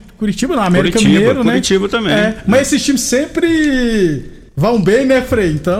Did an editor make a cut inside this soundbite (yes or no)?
yes